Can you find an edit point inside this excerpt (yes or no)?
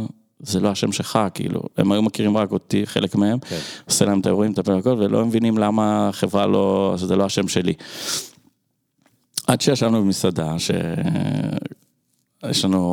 no